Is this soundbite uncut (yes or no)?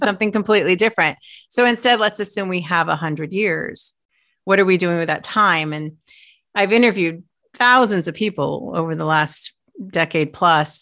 yes